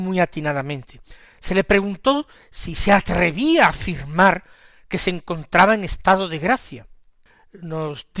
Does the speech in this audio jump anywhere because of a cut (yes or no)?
no